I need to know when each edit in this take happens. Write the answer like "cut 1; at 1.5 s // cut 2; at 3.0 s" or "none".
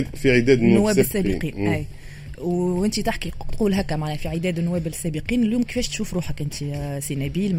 none